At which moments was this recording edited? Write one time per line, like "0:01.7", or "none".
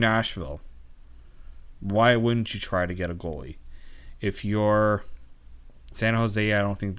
0:05.9